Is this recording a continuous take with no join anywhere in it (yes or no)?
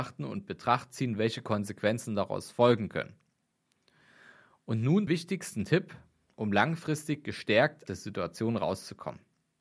no